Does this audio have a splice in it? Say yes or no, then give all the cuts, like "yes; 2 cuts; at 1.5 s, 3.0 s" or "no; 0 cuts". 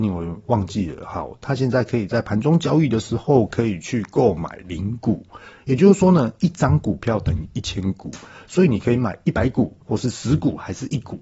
yes; 1 cut; at 9.8 s